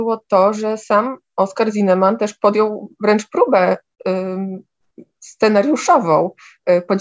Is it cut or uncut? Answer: uncut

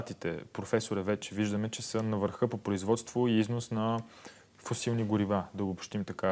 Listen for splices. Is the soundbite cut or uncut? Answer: uncut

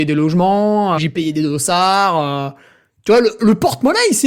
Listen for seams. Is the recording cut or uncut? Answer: cut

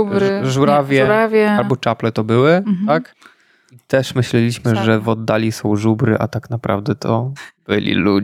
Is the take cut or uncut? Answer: uncut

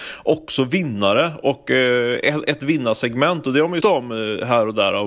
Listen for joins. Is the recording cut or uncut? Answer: cut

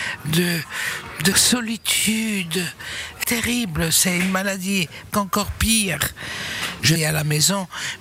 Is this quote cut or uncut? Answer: cut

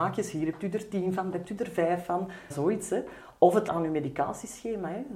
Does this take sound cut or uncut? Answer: cut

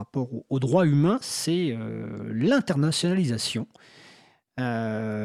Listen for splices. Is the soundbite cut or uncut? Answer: uncut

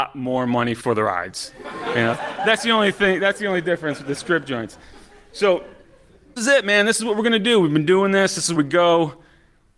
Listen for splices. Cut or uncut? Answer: cut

